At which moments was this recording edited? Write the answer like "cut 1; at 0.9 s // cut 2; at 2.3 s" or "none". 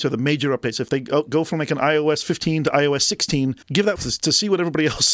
cut 1; at 3.6 s // cut 2; at 4.0 s